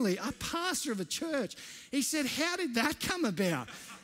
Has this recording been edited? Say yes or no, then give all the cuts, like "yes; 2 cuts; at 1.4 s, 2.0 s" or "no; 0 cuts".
no; 0 cuts